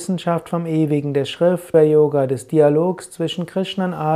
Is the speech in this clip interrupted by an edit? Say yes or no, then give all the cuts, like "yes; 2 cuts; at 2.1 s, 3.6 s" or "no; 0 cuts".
yes; 1 cut; at 1.7 s